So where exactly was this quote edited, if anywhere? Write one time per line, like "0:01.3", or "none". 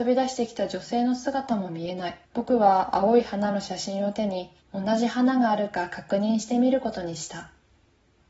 0:02.2
0:04.6